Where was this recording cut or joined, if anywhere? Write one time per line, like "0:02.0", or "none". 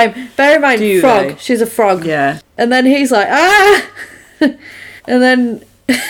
0:05.0